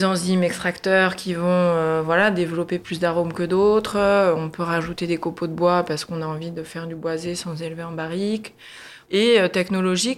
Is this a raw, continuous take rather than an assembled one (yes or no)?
yes